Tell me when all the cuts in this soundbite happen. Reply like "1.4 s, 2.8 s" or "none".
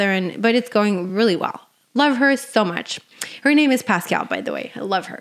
none